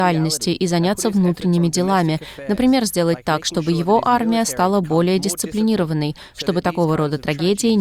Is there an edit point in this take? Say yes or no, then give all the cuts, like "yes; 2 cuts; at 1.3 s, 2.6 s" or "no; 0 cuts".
no; 0 cuts